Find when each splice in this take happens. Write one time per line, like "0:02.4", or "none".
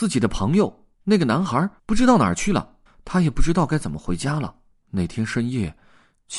0:00.9
0:01.8
0:02.9
0:04.7